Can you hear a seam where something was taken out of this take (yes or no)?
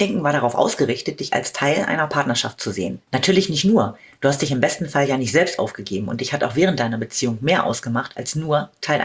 no